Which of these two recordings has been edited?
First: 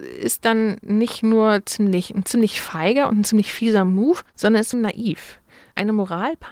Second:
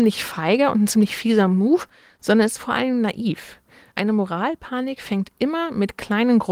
first; 2 cuts; at 4.3 s, 4.7 s

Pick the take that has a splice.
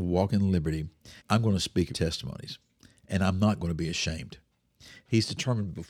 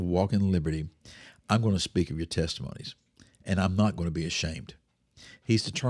first; 2 cuts; at 1.2 s, 1.9 s

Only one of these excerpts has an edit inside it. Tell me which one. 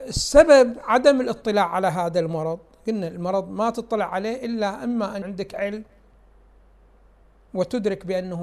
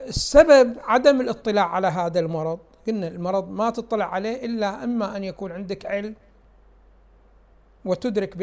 first; 1 cut; at 5.2 s

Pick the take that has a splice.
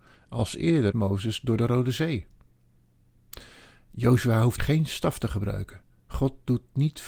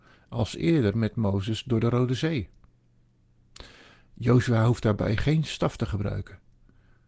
first; 3 cuts; at 0.9 s, 4.6 s, 5.9 s

